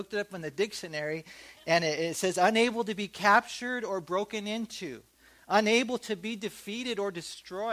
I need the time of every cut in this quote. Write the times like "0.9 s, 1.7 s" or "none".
none